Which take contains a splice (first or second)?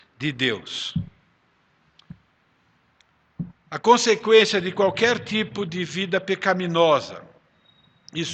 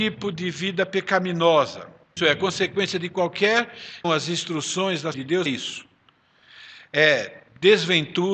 second